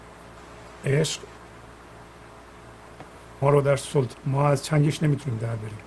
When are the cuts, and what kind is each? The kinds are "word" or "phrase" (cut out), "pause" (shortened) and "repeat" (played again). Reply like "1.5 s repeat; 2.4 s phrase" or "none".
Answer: 3.4 s word; 4.1 s word